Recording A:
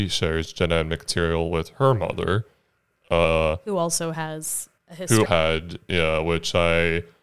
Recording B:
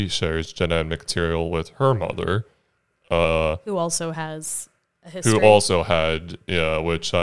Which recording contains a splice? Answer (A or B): A